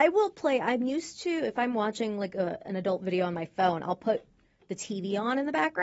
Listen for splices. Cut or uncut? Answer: uncut